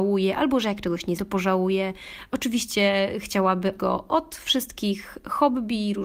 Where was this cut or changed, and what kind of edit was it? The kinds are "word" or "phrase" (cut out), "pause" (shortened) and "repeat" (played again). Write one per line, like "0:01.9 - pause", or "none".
0:01.2 - word
0:03.8 - word